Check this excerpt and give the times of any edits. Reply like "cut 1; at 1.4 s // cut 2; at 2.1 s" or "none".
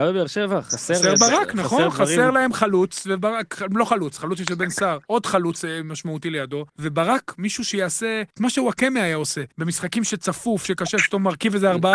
cut 1; at 5.0 s // cut 2; at 6.7 s // cut 3; at 8.3 s // cut 4; at 9.5 s